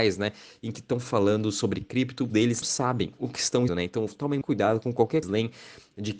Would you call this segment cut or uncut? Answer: cut